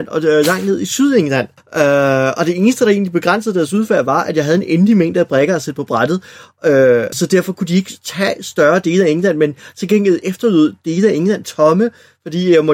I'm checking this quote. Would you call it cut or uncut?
cut